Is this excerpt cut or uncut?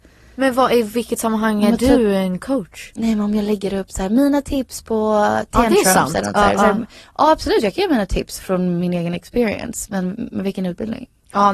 uncut